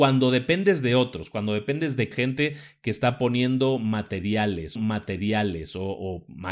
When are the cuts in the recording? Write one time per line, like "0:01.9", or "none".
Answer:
0:02.1
0:04.8